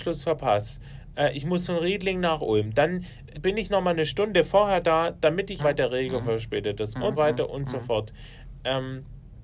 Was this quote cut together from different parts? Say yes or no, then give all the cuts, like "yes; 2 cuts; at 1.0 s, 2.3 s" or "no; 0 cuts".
yes; 3 cuts; at 3.3 s, 5.6 s, 7.2 s